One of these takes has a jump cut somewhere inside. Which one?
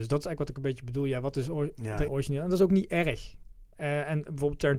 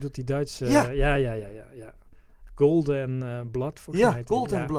first; 1 cut; at 2.1 s

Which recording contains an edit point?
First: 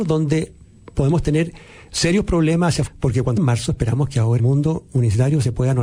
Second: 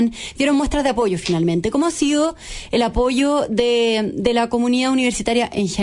first; 3 cuts; at 2.9 s, 3.4 s, 4.4 s

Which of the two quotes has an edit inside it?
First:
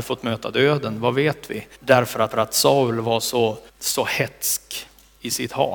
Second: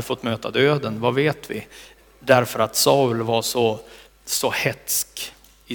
first; 3 cuts; at 1.7 s, 2.3 s, 3.7 s

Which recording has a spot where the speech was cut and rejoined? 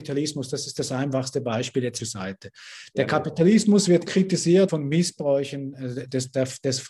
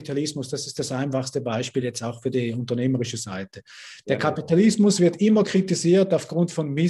first; 3 cuts; at 2.0 s, 4.1 s, 4.7 s

